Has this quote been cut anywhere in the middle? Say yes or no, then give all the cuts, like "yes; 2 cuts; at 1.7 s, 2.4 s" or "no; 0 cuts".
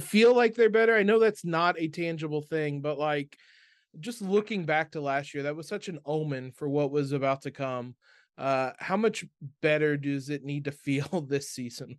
no; 0 cuts